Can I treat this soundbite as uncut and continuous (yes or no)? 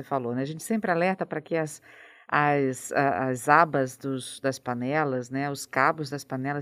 yes